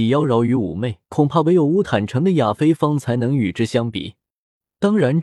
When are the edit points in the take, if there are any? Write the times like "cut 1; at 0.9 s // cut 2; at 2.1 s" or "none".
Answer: cut 1; at 1.0 s